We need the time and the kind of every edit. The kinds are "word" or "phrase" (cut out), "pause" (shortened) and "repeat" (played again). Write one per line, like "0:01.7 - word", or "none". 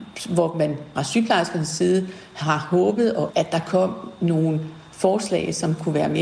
0:01.0 - word
0:03.3 - word